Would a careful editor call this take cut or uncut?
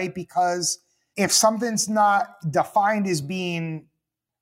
uncut